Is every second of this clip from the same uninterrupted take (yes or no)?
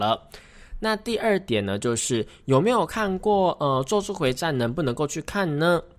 yes